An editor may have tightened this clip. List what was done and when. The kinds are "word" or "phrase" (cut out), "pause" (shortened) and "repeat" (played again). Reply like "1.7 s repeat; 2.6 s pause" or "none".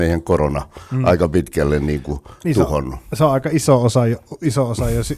none